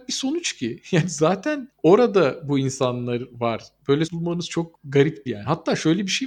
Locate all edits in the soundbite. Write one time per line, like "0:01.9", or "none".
0:04.1
0:05.3